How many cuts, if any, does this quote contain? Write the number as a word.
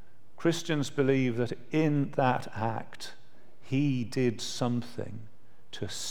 zero